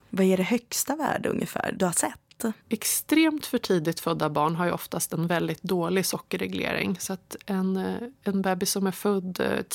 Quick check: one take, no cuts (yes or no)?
no